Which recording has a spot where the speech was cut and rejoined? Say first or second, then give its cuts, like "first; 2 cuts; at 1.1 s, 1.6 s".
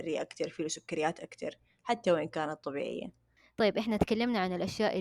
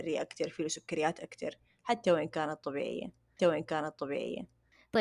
second; 1 cut; at 3.4 s